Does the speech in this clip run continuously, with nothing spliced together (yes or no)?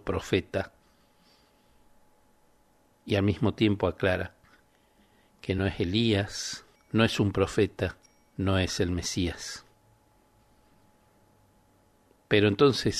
yes